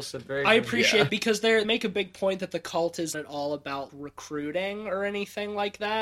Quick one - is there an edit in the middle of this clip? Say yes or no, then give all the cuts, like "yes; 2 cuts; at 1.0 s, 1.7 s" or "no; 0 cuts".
yes; 4 cuts; at 1.1 s, 1.6 s, 3.1 s, 3.9 s